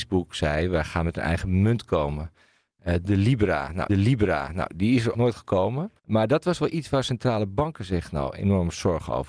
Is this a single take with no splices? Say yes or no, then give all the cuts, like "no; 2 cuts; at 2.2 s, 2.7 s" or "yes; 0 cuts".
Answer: no; 3 cuts; at 3.9 s, 5.1 s, 6.0 s